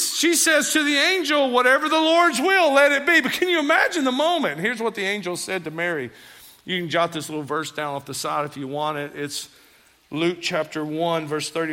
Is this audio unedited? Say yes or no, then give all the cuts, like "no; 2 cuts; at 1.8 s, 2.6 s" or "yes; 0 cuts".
yes; 0 cuts